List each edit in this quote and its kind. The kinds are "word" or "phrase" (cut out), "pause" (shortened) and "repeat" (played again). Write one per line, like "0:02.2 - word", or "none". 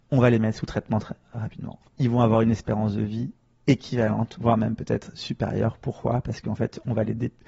0:01.9 - pause